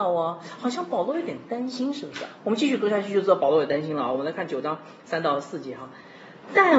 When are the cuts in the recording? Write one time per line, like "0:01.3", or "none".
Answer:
0:02.4